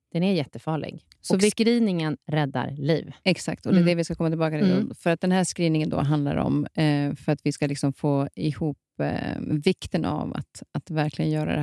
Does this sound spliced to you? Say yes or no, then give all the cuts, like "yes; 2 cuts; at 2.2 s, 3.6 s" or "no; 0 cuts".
no; 0 cuts